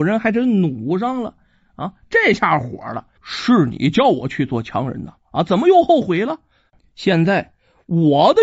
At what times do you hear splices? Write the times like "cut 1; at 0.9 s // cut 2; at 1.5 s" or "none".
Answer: cut 1; at 3.2 s